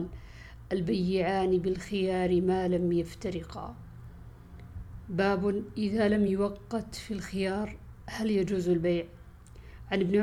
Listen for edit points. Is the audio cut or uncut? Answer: uncut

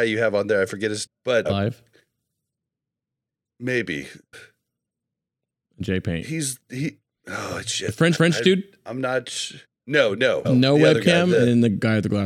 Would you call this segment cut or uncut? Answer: cut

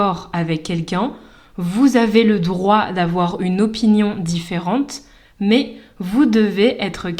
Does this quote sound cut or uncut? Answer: uncut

